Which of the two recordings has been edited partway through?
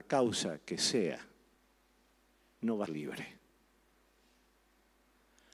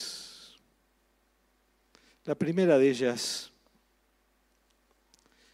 first; 2 cuts; at 1.5 s, 2.9 s

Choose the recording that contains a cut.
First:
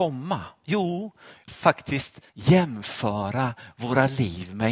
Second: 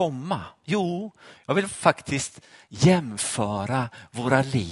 first; 2 cuts; at 1.5 s, 2.3 s

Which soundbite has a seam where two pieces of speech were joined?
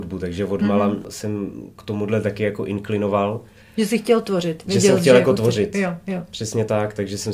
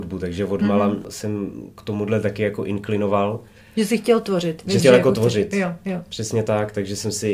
second; 1 cut; at 4.8 s

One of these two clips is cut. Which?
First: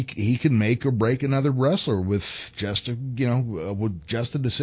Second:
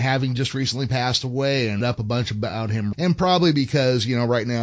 second; 2 cuts; at 1.8 s, 2.9 s

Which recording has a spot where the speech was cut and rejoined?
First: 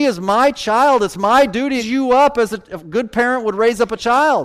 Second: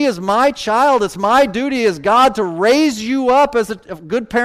first; 1 cut; at 1.8 s

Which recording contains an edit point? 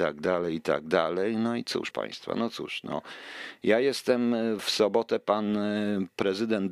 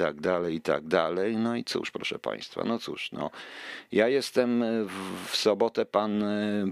first; 2 cuts; at 1.9 s, 4.6 s

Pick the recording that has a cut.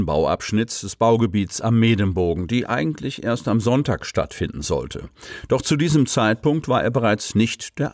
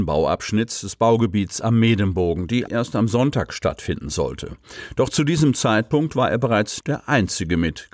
second; 2 cuts; at 2.7 s, 6.8 s

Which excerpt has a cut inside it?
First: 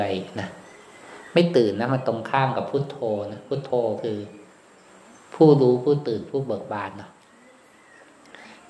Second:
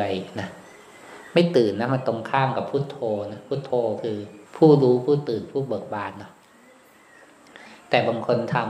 second; 1 cut; at 4.5 s

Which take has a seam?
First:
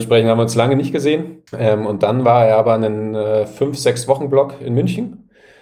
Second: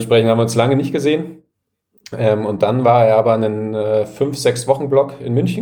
first; 1 cut; at 1.5 s

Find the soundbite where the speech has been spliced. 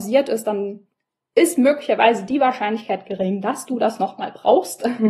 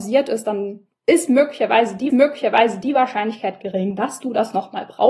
second; 2 cuts; at 1.0 s, 2.1 s

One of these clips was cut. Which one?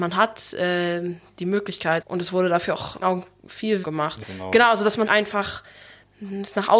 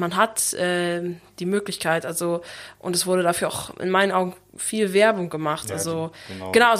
first; 5 cuts; at 2.0 s, 3.0 s, 3.8 s, 4.2 s, 5.1 s

